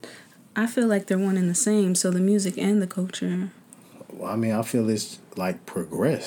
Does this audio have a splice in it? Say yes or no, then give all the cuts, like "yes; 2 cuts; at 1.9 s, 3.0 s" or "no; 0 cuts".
no; 0 cuts